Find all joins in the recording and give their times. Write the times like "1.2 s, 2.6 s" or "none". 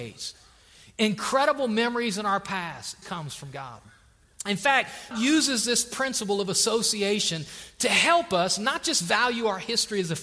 3.0 s, 5.1 s